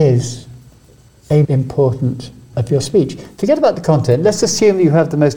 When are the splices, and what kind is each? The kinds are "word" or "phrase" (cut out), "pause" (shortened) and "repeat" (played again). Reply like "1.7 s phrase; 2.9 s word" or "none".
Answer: 1.4 s word; 2.5 s word